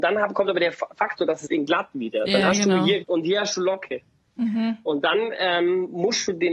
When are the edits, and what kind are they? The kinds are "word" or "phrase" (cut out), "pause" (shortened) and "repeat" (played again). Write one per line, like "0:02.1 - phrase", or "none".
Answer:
0:01.5 - word
0:03.0 - word